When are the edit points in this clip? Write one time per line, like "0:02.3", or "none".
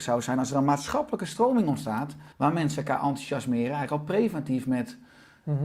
0:02.3